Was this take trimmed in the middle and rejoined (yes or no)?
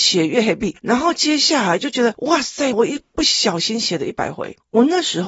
yes